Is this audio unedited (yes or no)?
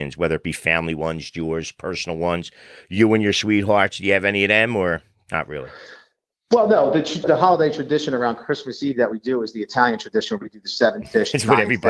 no